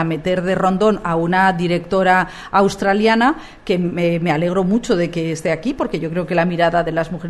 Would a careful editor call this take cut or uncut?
uncut